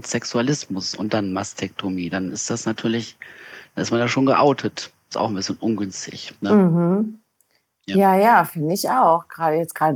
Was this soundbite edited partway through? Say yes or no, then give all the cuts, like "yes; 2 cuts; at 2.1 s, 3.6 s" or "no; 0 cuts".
no; 0 cuts